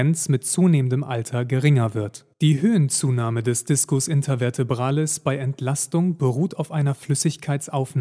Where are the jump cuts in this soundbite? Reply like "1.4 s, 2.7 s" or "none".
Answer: 2.3 s